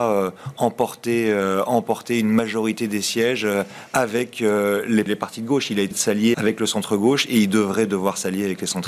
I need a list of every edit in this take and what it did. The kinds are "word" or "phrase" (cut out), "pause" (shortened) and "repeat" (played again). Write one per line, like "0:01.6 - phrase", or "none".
0:05.1 - word
0:05.9 - word
0:06.3 - word